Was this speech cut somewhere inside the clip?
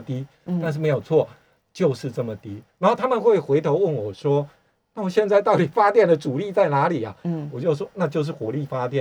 no; 0 cuts

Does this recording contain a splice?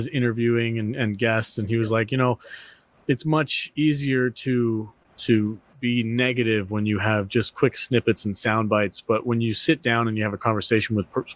no; 0 cuts

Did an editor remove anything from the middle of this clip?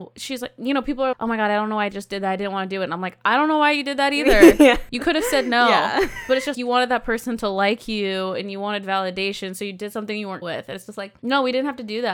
yes; 3 cuts; at 1.1 s, 6.5 s, 10.4 s

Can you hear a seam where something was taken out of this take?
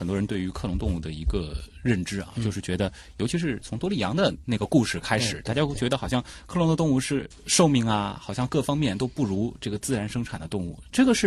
yes; 1 cut; at 7.3 s

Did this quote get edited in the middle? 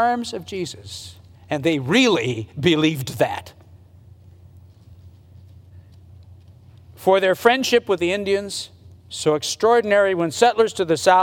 no; 0 cuts

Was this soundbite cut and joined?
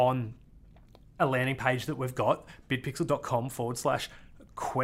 no; 0 cuts

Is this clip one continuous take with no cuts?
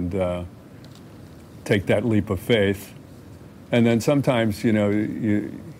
yes; 0 cuts

